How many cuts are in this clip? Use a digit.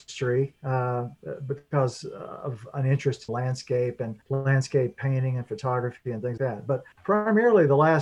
4